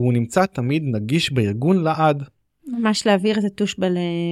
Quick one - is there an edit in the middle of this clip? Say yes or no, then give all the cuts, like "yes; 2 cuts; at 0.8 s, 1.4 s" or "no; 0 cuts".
no; 0 cuts